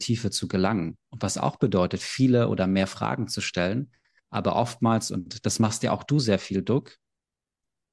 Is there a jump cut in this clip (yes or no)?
no